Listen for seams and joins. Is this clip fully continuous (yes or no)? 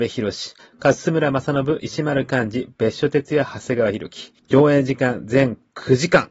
no